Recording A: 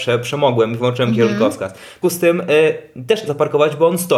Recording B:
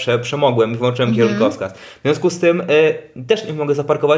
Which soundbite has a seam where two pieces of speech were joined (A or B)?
A